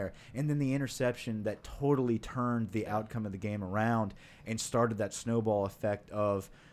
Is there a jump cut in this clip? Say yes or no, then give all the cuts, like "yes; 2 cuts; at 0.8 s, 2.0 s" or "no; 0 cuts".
no; 0 cuts